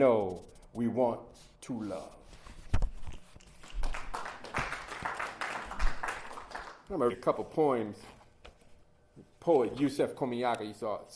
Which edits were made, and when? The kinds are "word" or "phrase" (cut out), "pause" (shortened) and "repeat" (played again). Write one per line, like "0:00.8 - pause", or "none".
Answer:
0:07.1 - word

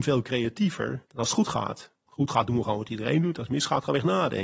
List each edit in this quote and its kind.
0:01.0 - pause

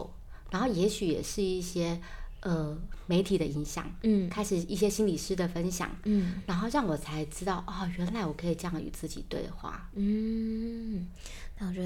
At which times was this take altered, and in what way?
none

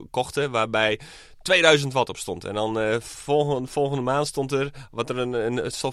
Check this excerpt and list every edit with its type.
none

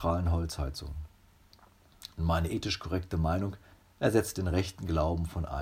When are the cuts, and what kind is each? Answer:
0:03.7 - pause

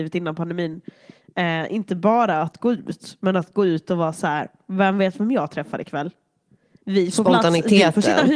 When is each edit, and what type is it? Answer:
none

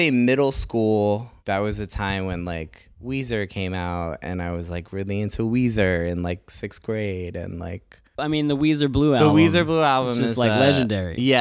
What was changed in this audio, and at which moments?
0:01.4 - pause

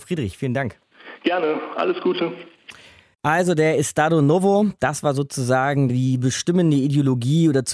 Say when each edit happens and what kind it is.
none

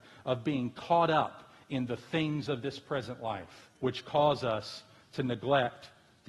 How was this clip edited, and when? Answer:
0:03.8 - pause

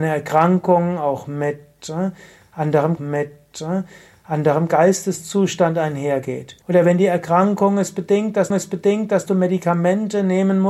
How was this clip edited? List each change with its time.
0:03.0 - repeat
0:06.6 - pause
0:08.5 - repeat

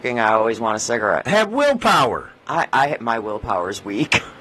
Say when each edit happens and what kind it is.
0:02.4 - pause

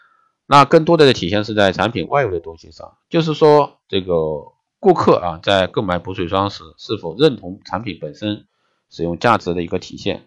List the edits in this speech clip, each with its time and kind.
none

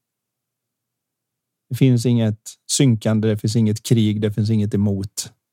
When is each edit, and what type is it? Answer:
none

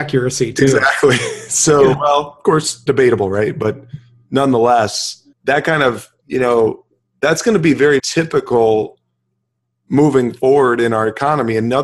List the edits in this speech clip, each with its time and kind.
0:05.3 - pause
0:07.0 - pause
0:08.0 - word

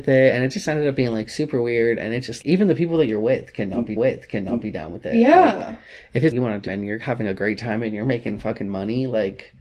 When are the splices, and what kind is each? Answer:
0:02.4 - word
0:04.0 - repeat
0:06.3 - word
0:06.7 - word

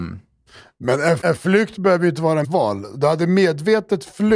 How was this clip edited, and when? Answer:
0:01.2 - word
0:02.4 - word

